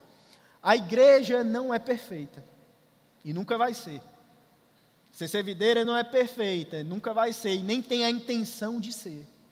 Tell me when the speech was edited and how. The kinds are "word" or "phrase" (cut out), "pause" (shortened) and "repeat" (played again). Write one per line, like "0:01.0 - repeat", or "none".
none